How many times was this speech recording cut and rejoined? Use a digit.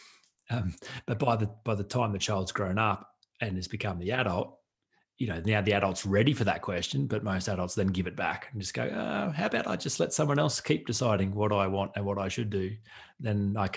0